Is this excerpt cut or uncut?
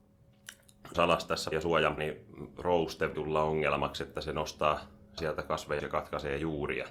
cut